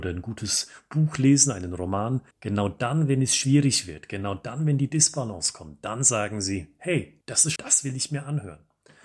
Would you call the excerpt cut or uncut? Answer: cut